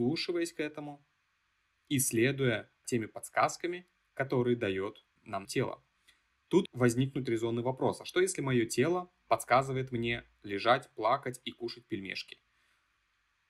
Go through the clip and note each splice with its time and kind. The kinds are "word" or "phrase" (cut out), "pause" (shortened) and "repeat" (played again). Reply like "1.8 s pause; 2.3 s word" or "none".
2.8 s word; 5.4 s word; 6.7 s word